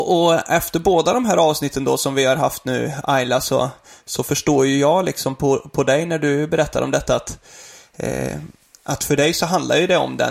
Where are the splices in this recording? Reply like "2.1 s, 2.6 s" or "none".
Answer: none